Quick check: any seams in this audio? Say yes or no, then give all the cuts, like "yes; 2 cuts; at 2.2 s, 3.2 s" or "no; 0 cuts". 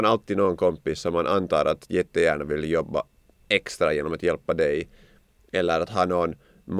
no; 0 cuts